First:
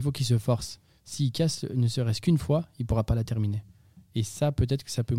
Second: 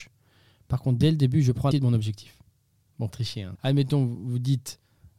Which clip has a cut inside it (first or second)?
second